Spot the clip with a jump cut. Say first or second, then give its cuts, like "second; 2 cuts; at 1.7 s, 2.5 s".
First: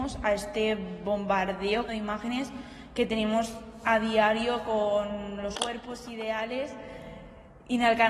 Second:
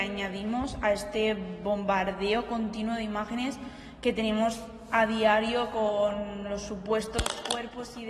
first; 2 cuts; at 1.9 s, 5.5 s